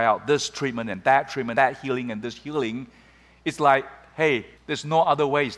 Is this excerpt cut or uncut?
cut